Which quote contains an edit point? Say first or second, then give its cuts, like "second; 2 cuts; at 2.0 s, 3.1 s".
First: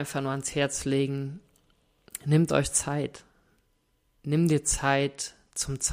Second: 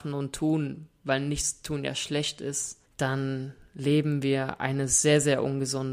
second; 1 cut; at 2.9 s